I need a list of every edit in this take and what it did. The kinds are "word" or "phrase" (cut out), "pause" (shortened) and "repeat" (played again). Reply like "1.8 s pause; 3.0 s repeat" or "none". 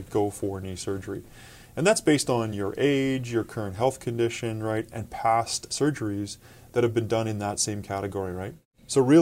none